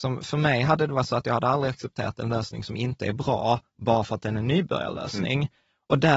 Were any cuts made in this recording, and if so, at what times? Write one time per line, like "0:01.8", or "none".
none